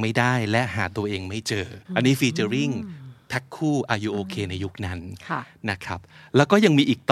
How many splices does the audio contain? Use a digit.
1